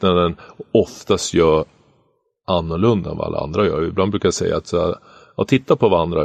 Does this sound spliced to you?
no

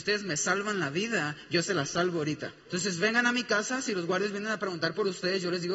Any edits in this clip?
yes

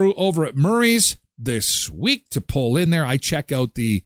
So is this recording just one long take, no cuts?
yes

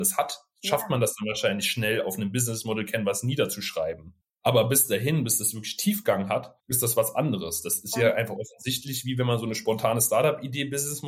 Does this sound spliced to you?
yes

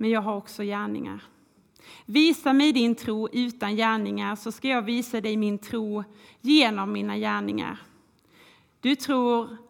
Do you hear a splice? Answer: no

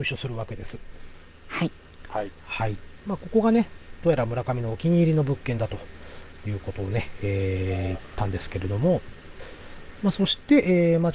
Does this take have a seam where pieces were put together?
no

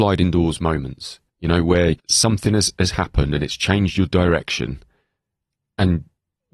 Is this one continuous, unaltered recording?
no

